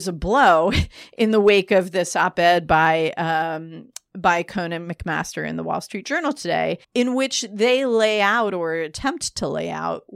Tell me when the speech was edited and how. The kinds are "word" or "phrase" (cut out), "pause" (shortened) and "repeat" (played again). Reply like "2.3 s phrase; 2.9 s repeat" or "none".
6.8 s pause